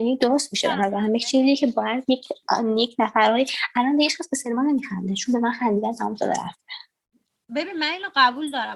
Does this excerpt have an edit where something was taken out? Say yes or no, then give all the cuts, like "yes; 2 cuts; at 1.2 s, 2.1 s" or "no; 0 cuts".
no; 0 cuts